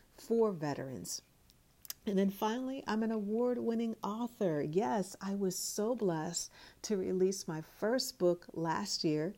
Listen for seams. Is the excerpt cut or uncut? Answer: uncut